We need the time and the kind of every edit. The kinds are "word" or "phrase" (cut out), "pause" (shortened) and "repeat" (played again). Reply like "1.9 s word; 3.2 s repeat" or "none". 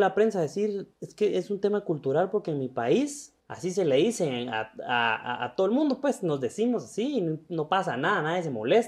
0.9 s pause; 3.4 s pause